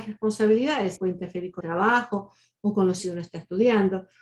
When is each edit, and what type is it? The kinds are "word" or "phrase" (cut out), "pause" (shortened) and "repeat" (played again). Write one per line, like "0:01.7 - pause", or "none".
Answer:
0:01.0 - word
0:01.6 - word
0:03.0 - word